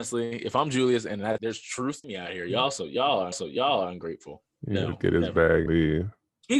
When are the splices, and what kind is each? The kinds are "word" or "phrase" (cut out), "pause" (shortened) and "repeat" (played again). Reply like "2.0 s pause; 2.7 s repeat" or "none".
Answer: 1.4 s word; 2.0 s phrase; 3.3 s repeat; 5.7 s word